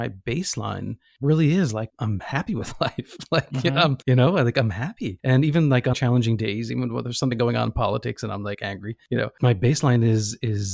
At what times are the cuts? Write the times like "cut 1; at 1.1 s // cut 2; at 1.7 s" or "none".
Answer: cut 1; at 1.9 s // cut 2; at 4.0 s // cut 3; at 5.9 s